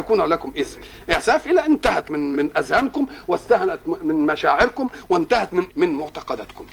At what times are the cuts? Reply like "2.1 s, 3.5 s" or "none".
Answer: 1.4 s, 2.3 s, 5.7 s